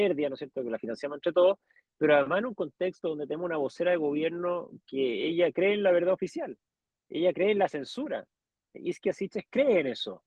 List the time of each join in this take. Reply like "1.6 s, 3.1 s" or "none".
none